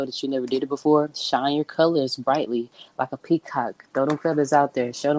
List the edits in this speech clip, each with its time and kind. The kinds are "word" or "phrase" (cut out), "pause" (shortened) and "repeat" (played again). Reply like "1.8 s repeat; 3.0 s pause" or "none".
none